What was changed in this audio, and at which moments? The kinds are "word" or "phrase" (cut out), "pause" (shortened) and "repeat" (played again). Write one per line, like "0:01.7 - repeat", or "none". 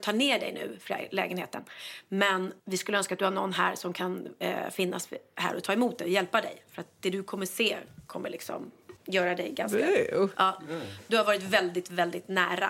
0:02.6 - pause
0:09.0 - pause